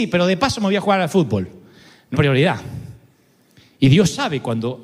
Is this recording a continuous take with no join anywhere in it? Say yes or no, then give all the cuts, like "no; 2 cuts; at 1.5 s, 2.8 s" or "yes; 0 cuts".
no; 1 cut; at 2.1 s